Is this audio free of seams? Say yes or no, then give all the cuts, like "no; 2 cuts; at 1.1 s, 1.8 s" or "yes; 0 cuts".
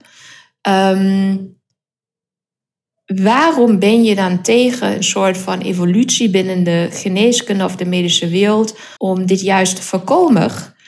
no; 1 cut; at 9.0 s